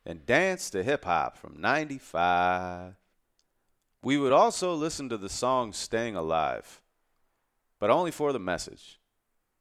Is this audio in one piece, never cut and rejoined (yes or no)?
yes